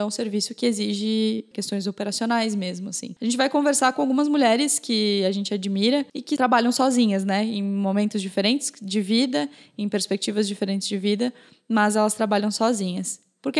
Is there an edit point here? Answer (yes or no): no